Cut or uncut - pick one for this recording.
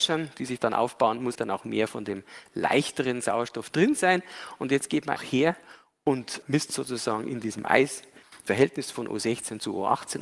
cut